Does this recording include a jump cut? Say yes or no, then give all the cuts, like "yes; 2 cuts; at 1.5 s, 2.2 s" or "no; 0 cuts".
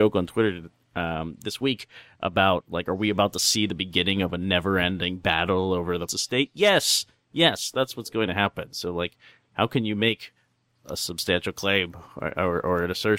yes; 1 cut; at 6.1 s